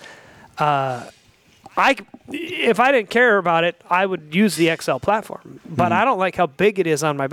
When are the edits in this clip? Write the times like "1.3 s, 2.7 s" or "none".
none